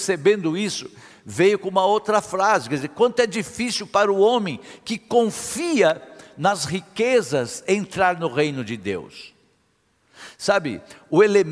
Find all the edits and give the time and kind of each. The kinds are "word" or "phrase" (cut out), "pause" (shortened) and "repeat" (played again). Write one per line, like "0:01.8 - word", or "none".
none